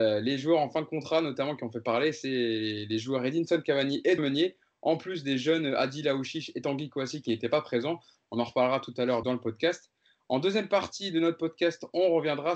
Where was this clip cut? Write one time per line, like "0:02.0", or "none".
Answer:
0:04.2
0:09.2